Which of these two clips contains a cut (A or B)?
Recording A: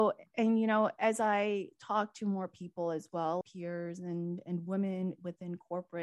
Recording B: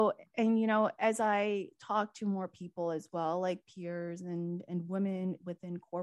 A